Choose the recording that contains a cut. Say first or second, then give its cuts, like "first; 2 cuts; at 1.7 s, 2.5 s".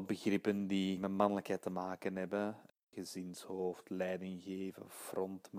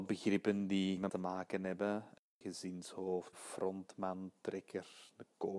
second; 2 cuts; at 1.1 s, 3.3 s